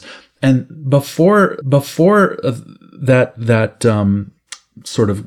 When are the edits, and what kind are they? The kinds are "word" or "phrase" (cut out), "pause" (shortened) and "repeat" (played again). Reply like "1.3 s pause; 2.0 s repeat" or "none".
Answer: 1.6 s repeat

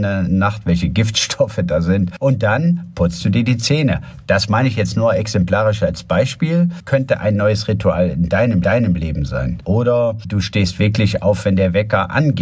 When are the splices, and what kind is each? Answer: 8.6 s repeat

